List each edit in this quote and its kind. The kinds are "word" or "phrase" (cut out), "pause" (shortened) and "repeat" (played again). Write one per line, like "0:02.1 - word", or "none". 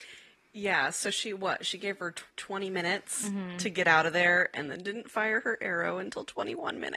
0:02.3 - pause